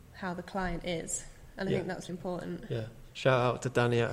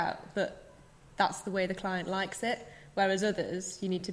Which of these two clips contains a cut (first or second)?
first